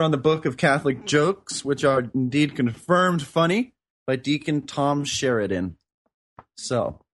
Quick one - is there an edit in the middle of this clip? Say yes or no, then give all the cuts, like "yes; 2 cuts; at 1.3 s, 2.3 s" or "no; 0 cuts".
no; 0 cuts